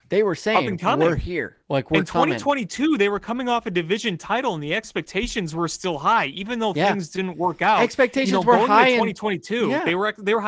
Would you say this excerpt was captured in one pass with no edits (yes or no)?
no